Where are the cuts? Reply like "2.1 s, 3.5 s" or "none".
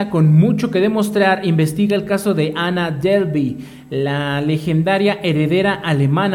none